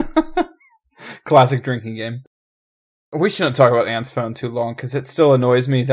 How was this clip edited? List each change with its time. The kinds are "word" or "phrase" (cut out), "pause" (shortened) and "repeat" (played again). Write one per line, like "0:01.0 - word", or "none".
none